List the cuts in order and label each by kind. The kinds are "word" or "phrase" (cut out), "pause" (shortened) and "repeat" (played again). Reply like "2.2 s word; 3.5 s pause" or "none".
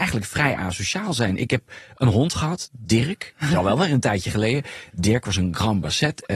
none